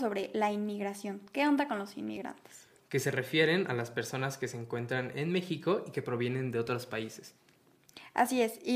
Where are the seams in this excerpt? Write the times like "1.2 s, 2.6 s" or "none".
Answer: none